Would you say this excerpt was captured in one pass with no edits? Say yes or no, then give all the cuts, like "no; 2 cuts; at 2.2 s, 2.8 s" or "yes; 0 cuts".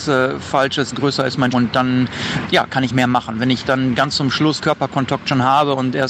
no; 5 cuts; at 0.9 s, 1.5 s, 2.5 s, 2.9 s, 4.6 s